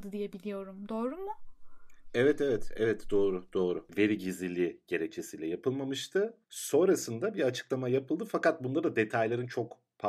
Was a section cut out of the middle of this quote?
yes; 1 cut; at 6.4 s

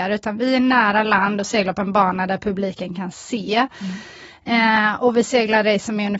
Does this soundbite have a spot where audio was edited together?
no; 0 cuts

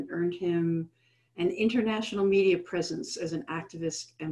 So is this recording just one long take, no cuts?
yes; 0 cuts

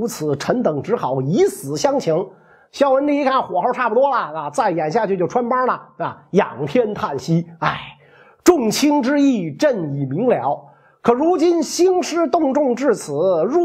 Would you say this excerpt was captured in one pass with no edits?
yes; 0 cuts

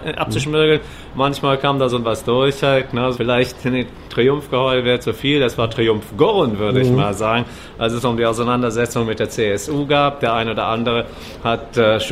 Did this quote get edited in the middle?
yes; 2 cuts; at 2.0 s, 3.1 s

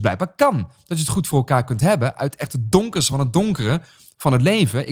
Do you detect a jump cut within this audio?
no; 0 cuts

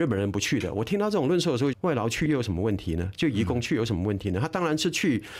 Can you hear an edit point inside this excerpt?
yes; 1 cut; at 1.7 s

